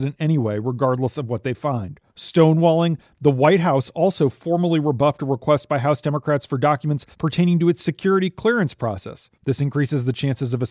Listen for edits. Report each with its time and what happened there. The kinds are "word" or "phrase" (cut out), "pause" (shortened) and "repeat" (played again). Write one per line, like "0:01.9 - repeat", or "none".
0:02.1 - pause
0:07.1 - pause
0:09.3 - pause